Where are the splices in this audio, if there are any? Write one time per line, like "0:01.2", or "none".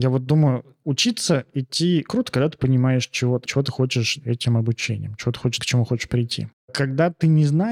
0:02.1
0:03.4
0:04.2
0:05.6